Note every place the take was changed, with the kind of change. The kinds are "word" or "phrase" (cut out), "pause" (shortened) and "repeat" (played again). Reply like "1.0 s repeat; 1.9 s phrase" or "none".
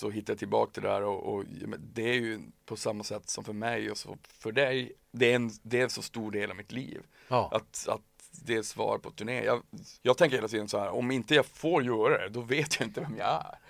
2.6 s pause; 10.0 s pause